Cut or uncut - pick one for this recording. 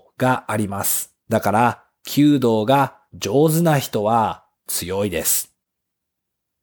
cut